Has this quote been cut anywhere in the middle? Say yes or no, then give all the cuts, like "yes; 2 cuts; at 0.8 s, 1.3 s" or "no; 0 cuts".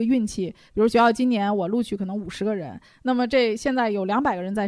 no; 0 cuts